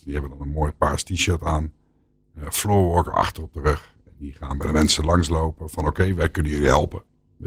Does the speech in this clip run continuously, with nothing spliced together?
yes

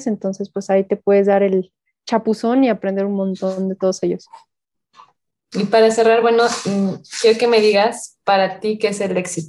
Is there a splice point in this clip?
no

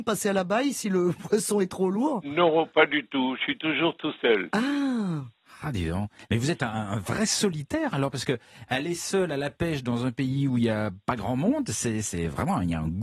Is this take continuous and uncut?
yes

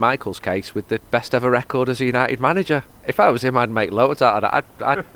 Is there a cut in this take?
yes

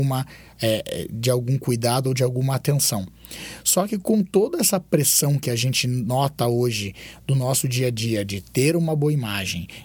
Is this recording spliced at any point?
no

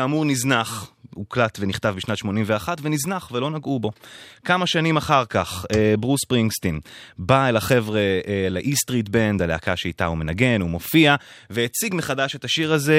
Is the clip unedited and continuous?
yes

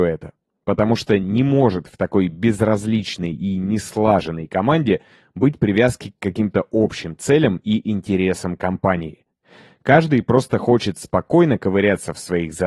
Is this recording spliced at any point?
no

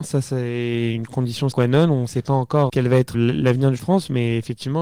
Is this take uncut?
no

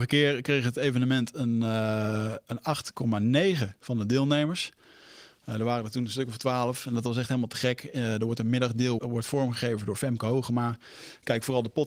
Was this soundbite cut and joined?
yes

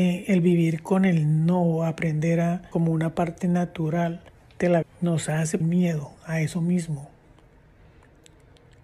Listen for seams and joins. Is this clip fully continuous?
no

